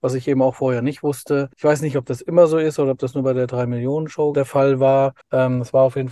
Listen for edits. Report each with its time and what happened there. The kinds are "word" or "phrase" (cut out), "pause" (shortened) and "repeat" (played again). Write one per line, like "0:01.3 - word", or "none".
0:01.5 - pause
0:04.3 - word
0:05.2 - pause